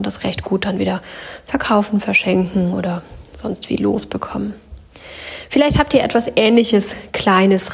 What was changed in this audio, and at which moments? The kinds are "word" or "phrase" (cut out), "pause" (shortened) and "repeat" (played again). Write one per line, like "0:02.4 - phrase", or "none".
none